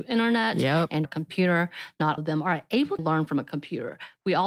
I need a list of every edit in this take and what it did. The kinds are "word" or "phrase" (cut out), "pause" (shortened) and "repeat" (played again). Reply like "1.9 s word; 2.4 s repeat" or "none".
1.0 s word; 2.2 s word; 3.0 s word